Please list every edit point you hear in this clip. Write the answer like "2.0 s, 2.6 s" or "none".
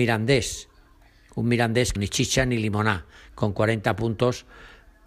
2.0 s